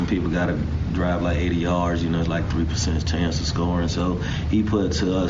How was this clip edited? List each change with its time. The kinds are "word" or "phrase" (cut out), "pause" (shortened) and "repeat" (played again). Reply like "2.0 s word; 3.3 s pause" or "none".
none